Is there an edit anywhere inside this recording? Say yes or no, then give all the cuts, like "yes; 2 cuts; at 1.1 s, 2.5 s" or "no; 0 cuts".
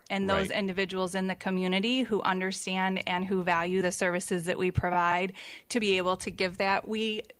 no; 0 cuts